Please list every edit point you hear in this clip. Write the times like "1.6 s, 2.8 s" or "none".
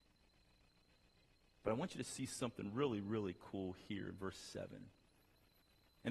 none